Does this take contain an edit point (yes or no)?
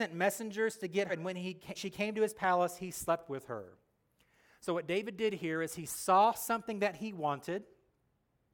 yes